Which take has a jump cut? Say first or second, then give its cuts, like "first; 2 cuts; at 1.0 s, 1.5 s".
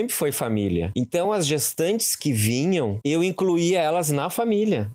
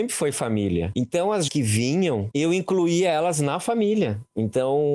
second; 1 cut; at 1.5 s